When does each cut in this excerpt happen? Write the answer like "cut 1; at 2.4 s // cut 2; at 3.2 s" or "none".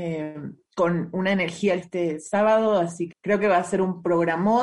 cut 1; at 1.8 s // cut 2; at 3.1 s